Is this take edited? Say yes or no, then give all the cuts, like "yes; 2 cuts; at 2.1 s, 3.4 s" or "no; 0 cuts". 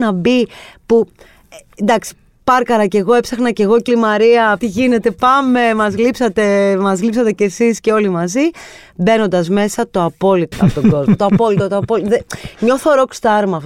yes; 3 cuts; at 3.9 s, 4.6 s, 10.5 s